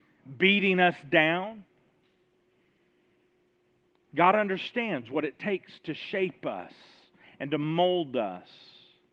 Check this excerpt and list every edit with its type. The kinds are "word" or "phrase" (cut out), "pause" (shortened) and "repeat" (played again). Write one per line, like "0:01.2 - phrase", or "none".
none